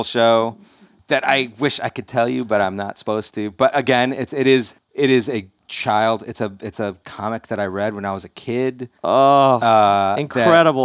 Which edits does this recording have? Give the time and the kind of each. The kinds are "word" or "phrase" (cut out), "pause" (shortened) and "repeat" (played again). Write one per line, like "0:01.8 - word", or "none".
0:04.8 - pause
0:09.0 - pause

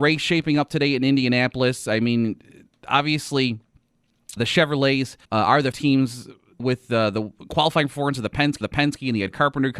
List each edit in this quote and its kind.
0:04.4 - word
0:05.2 - pause
0:05.7 - word
0:06.6 - word
0:08.6 - repeat

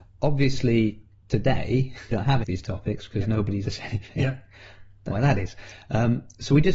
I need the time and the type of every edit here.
0:02.1 - word
0:02.4 - word
0:03.6 - word
0:05.1 - word

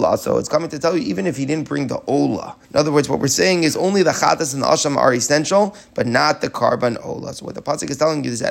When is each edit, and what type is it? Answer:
0:02.6 - pause

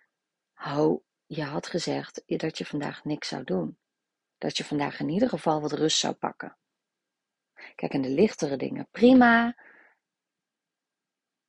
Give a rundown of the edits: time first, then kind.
none

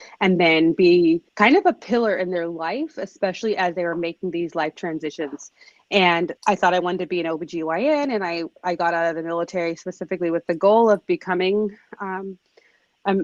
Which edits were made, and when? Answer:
0:01.3 - pause
0:06.4 - pause
0:08.6 - pause

